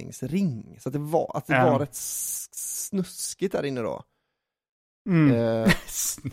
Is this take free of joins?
yes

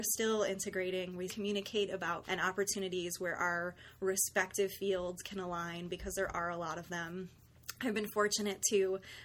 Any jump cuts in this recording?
yes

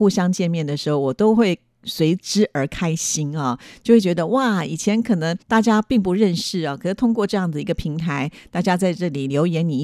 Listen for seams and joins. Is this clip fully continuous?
no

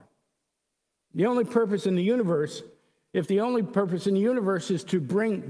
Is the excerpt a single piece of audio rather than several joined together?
yes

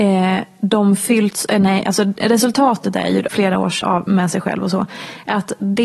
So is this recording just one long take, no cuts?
no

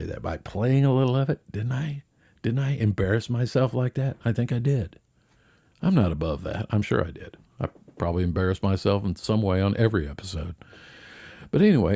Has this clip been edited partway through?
no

